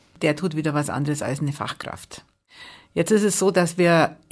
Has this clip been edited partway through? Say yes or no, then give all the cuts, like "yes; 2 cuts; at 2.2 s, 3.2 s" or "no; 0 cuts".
no; 0 cuts